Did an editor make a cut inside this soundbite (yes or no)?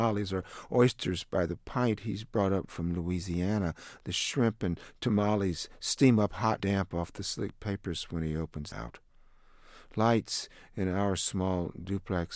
yes